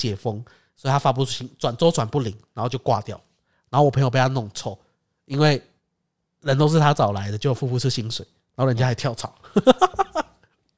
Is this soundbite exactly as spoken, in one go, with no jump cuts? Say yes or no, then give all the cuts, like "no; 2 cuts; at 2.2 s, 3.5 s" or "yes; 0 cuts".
yes; 0 cuts